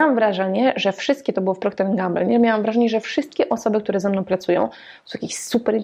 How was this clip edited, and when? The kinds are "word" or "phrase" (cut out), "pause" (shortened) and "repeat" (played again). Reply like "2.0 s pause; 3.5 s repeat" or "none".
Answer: none

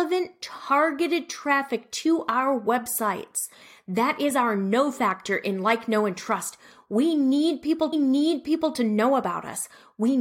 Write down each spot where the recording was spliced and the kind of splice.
7.9 s repeat

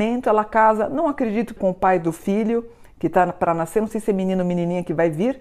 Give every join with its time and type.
1.6 s word

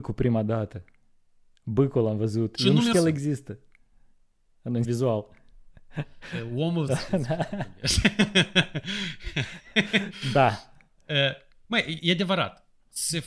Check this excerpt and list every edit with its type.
2.9 s word; 4.8 s word; 6.9 s phrase; 12.0 s word

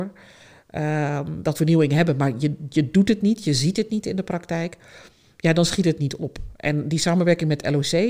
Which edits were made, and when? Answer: 1.5 s phrase

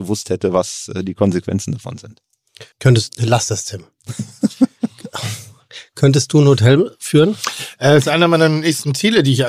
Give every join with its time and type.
2.7 s pause

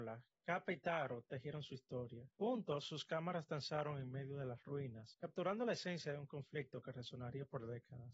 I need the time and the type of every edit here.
none

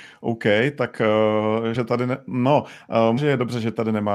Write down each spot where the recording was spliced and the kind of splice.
1.7 s word; 3.2 s word

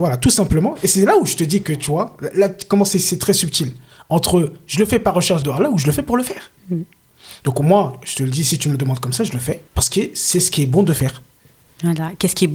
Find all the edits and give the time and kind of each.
5.4 s word; 6.6 s pause; 9.7 s pause

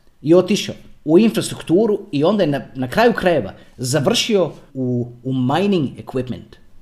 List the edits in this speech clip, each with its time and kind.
4.7 s word

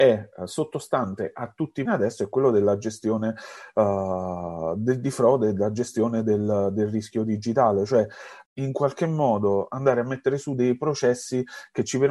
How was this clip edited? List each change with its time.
1.9 s phrase

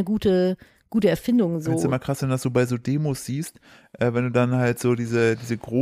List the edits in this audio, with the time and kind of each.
none

